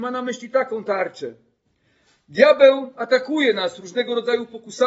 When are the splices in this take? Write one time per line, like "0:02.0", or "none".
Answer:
none